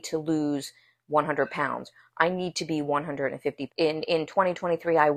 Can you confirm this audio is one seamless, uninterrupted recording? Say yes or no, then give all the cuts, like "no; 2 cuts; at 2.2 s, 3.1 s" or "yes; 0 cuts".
no; 1 cut; at 3.7 s